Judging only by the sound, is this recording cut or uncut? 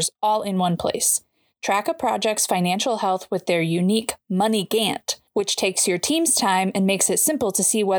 uncut